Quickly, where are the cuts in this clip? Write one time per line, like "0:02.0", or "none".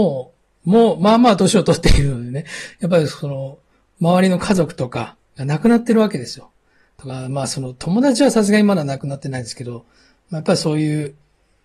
none

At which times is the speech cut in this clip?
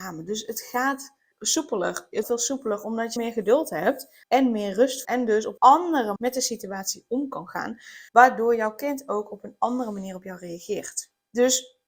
0:01.3
0:02.2
0:03.2
0:04.2
0:05.0
0:05.6
0:06.2
0:08.1

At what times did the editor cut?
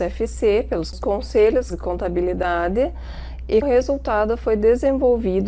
0:00.9
0:01.7
0:03.6

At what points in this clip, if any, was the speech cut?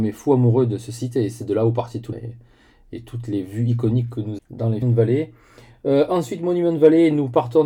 0:02.1
0:04.4
0:04.8

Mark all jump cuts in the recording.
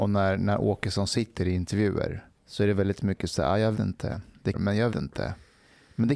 0:02.3
0:03.7
0:04.5
0:04.9

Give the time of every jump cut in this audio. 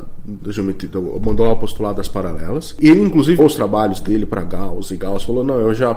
0:03.4

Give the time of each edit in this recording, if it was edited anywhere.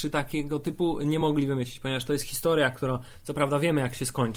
none

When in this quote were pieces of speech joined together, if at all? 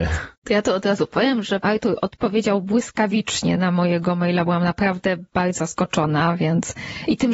0:01.6
0:03.6
0:05.6

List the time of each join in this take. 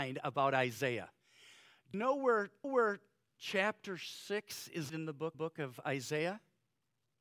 0:01.9
0:02.6
0:04.9
0:05.3

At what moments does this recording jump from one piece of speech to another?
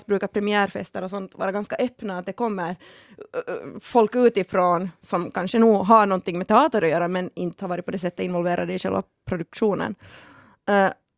none

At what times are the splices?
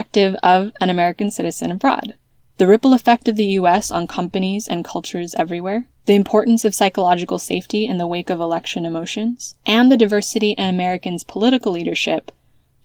0:02.3
0:06.0
0:09.6

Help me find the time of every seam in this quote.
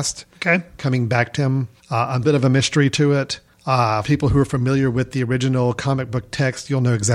0:01.4
0:02.2
0:04.0

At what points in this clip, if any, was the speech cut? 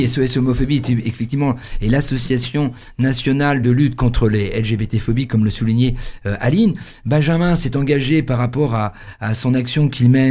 none

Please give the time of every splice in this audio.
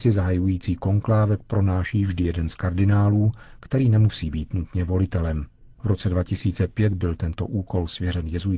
none

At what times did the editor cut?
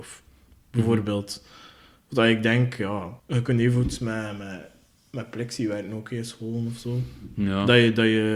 0:03.2

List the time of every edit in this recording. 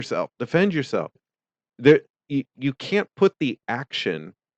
none

